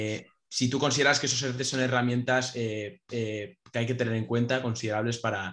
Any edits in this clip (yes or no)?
yes